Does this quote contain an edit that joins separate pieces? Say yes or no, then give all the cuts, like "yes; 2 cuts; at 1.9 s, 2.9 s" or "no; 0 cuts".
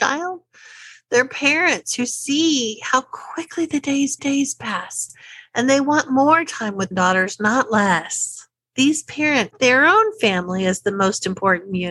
yes; 4 cuts; at 4.2 s, 6.9 s, 8.7 s, 9.5 s